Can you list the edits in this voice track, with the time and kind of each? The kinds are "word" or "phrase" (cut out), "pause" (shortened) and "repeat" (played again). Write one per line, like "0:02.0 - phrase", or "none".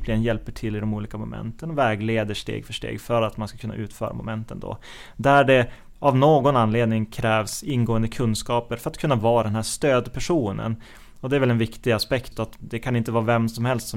0:12.3 - word